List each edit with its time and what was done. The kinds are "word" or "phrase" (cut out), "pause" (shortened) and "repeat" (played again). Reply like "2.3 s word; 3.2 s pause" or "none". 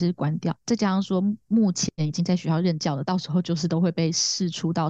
1.9 s pause